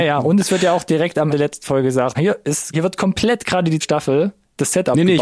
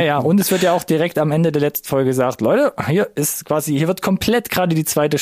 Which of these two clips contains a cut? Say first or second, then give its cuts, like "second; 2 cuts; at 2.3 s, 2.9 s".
first; 4 cuts; at 1.3 s, 2.1 s, 2.7 s, 3.8 s